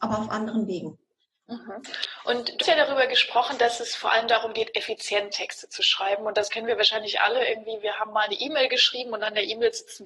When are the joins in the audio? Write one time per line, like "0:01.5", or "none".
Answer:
0:02.6